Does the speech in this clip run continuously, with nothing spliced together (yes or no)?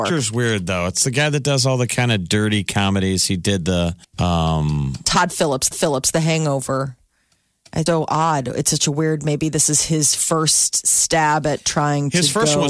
no